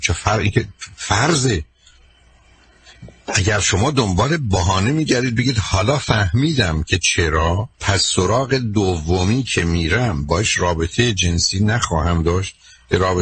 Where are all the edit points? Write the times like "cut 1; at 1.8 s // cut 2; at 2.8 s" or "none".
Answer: cut 1; at 7.7 s